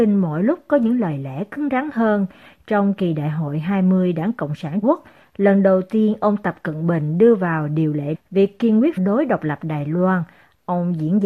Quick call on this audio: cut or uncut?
cut